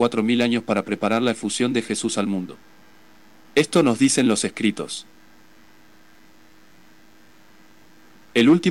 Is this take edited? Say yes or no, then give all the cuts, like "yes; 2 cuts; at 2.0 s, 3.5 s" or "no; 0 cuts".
no; 0 cuts